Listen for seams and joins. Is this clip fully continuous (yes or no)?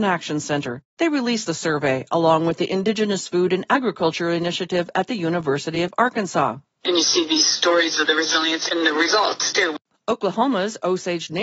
yes